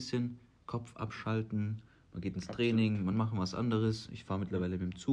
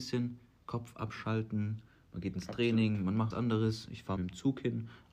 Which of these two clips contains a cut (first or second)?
second